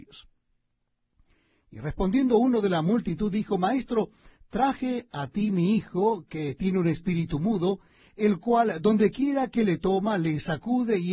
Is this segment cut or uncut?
uncut